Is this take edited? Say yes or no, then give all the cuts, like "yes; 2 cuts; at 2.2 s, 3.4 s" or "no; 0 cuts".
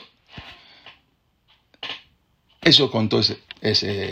no; 0 cuts